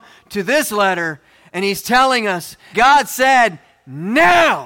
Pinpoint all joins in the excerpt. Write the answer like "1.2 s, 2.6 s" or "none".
2.7 s